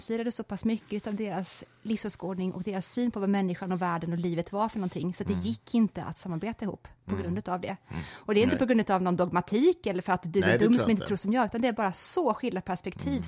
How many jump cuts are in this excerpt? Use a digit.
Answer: 0